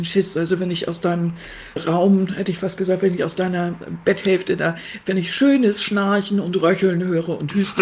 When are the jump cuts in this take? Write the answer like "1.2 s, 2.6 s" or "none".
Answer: 1.8 s